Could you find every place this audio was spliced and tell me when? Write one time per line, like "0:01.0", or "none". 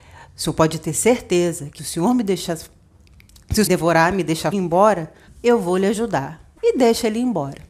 0:01.8
0:03.7
0:04.5
0:05.3
0:06.6